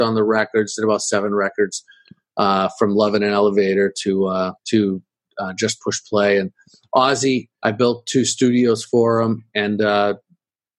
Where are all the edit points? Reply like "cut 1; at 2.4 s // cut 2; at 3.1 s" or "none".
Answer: cut 1; at 4.6 s // cut 2; at 7.5 s